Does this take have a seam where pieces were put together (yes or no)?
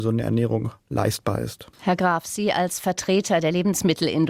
yes